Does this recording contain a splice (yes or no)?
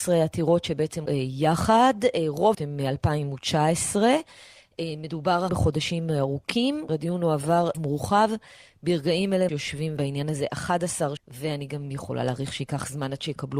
yes